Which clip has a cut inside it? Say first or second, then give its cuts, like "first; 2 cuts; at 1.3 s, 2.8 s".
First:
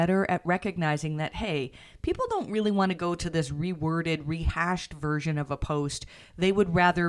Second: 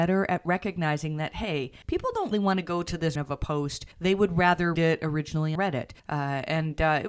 second; 7 cuts; at 1.8 s, 2.3 s, 3.2 s, 3.9 s, 4.8 s, 5.6 s, 6.0 s